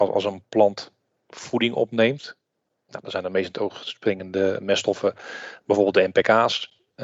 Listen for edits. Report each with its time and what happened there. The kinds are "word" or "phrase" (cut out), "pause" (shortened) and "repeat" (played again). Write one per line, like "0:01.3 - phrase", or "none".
none